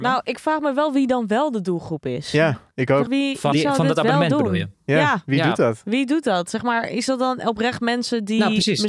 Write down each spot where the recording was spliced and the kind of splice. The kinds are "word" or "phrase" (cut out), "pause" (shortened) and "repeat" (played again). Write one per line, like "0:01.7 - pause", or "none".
0:02.7 - pause
0:03.1 - word
0:03.5 - word
0:04.7 - pause